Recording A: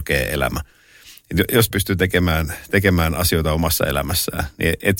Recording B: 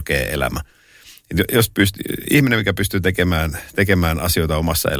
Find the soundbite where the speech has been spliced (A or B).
A